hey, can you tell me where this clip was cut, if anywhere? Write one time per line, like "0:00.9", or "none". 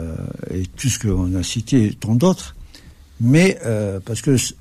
none